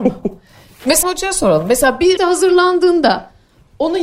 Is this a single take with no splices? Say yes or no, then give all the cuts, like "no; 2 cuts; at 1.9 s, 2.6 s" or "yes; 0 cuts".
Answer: no; 2 cuts; at 1.0 s, 2.2 s